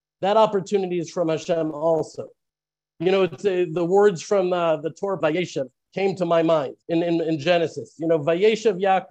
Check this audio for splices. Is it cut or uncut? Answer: cut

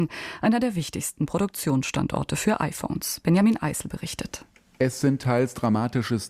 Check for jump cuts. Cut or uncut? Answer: uncut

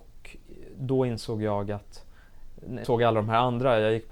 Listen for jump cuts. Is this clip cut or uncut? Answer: cut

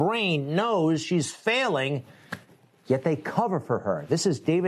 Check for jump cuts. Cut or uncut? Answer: uncut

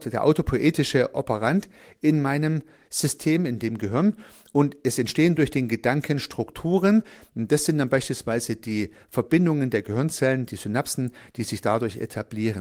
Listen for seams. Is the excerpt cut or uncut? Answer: uncut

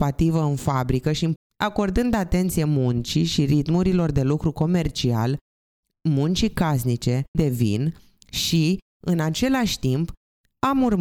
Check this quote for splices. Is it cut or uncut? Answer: cut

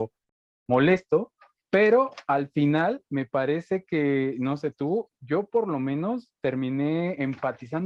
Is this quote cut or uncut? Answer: uncut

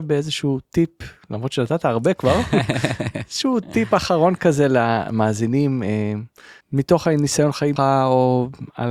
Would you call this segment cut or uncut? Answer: cut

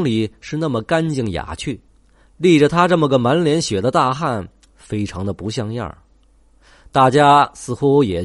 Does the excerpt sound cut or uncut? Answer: uncut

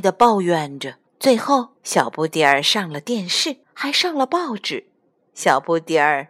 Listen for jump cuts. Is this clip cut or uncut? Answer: cut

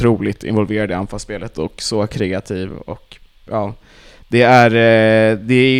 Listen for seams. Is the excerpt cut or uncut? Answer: uncut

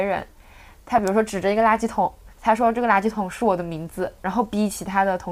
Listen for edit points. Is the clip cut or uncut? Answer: cut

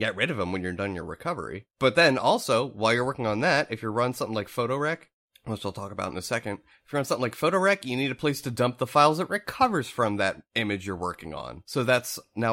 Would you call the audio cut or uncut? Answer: uncut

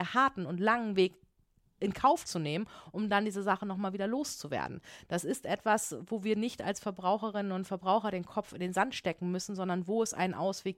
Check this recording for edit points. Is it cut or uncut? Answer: uncut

